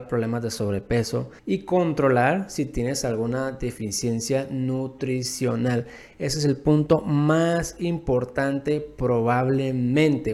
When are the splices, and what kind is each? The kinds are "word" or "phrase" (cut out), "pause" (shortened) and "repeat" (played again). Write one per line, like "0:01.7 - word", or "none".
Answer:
0:01.4 - pause